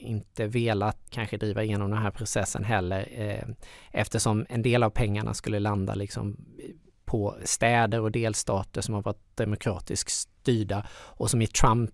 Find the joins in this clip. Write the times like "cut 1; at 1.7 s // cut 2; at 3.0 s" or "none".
cut 1; at 1.1 s // cut 2; at 6.8 s